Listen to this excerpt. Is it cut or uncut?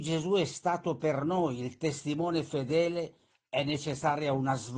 uncut